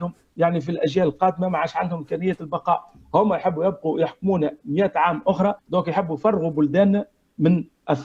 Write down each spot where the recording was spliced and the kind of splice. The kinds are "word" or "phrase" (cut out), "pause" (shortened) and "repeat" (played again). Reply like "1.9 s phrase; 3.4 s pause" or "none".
5.6 s pause